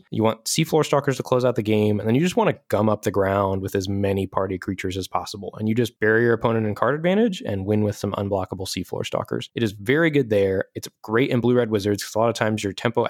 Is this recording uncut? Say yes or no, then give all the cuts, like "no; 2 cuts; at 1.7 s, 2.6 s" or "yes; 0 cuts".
yes; 0 cuts